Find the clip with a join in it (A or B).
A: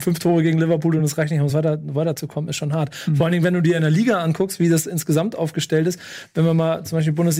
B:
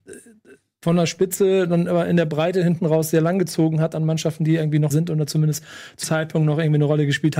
B